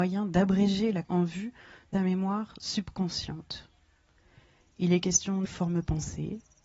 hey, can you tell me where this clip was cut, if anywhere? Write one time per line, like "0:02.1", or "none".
0:01.0
0:01.9
0:05.4